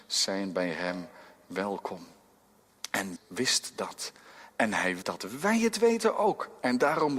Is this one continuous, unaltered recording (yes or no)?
no